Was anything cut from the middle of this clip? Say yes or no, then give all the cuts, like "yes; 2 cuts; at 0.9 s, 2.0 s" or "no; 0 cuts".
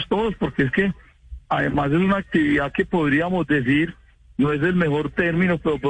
no; 0 cuts